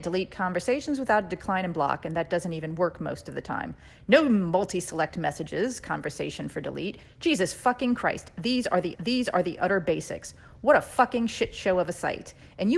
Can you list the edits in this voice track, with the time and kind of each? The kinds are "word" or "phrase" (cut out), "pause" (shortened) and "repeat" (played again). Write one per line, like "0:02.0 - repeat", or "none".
0:08.9 - repeat